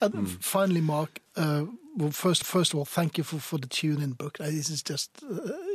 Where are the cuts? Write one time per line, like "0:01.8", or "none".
0:01.3
0:02.4